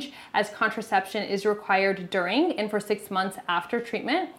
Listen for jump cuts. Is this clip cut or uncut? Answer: uncut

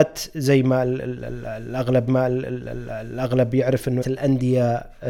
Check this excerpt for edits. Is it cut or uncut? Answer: cut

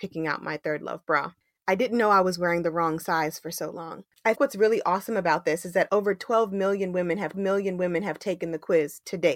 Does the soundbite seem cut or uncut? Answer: cut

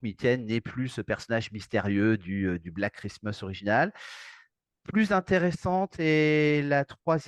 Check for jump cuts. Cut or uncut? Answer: uncut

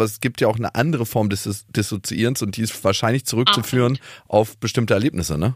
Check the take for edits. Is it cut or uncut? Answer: uncut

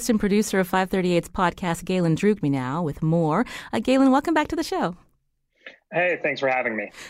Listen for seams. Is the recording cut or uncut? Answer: cut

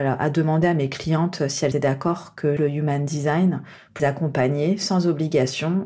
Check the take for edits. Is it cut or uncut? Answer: cut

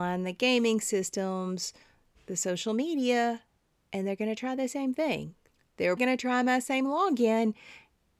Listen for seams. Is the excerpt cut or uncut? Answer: cut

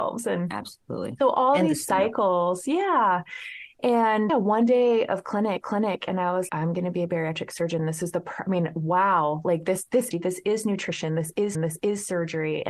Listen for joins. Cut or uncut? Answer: cut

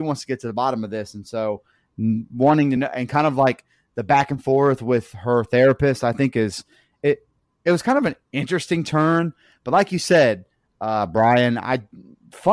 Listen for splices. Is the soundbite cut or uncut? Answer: uncut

